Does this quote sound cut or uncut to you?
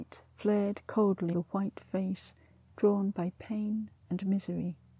cut